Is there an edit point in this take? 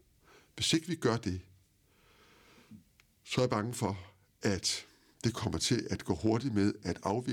no; 0 cuts

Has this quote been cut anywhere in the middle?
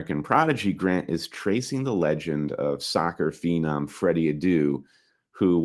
no; 0 cuts

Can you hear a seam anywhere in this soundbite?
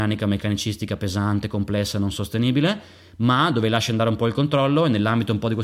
no; 0 cuts

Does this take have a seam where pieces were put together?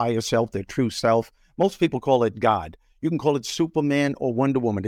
no; 0 cuts

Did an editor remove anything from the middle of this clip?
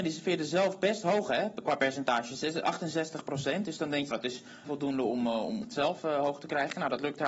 yes; 3 cuts; at 4.1 s, 4.7 s, 5.6 s

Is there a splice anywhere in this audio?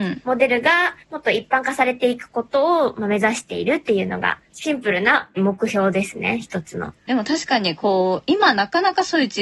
yes; 3 cuts; at 1.0 s, 4.4 s, 7.0 s

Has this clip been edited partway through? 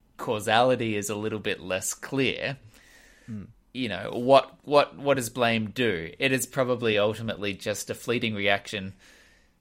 no; 0 cuts

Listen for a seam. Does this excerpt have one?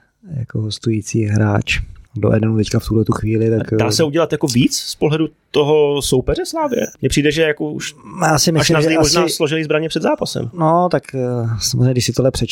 yes; 2 cuts; at 2.1 s, 6.9 s

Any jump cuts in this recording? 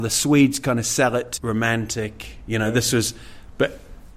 yes; 1 cut; at 1.4 s

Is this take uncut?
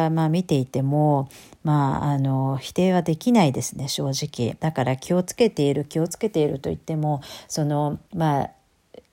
no; 2 cuts; at 4.6 s, 8.0 s

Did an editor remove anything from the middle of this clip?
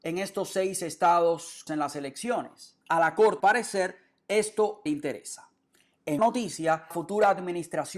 yes; 6 cuts; at 1.7 s, 2.8 s, 3.4 s, 4.9 s, 6.2 s, 6.9 s

